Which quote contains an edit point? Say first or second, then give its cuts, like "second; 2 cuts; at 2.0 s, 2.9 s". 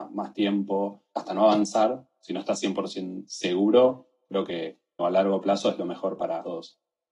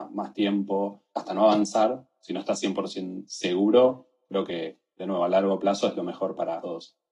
first; 1 cut; at 5.0 s